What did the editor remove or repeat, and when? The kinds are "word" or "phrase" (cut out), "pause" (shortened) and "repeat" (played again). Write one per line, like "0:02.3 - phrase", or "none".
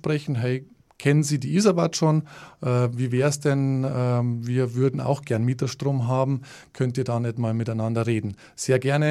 none